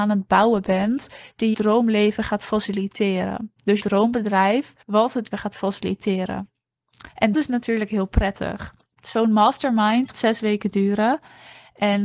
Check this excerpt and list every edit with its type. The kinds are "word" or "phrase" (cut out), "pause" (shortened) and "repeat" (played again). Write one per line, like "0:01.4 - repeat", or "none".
0:01.5 - word
0:03.8 - word
0:04.8 - pause
0:05.3 - phrase
0:07.3 - word
0:08.9 - pause
0:10.1 - word